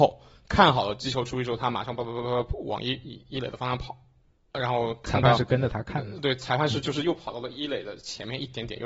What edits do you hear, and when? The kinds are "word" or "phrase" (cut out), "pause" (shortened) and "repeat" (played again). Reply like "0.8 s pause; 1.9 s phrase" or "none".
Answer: none